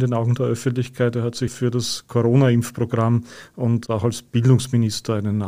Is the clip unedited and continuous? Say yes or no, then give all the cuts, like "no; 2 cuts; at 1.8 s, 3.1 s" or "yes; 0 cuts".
no; 1 cut; at 1.5 s